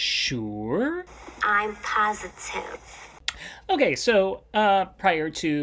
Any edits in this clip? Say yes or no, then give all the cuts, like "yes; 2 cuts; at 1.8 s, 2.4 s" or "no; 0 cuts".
no; 0 cuts